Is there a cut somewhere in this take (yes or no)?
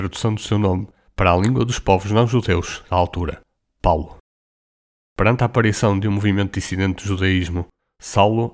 no